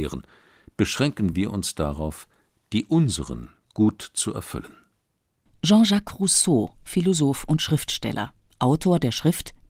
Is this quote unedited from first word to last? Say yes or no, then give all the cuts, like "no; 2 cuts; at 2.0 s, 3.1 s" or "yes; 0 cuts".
yes; 0 cuts